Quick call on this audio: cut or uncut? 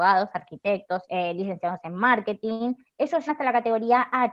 cut